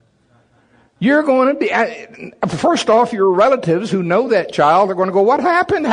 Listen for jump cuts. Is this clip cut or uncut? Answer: uncut